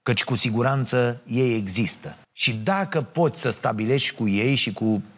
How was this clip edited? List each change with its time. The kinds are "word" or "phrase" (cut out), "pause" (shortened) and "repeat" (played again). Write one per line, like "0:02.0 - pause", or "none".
0:02.2 - pause